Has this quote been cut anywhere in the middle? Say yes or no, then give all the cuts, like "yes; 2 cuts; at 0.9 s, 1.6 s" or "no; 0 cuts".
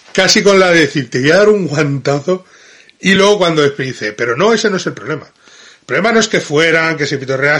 no; 0 cuts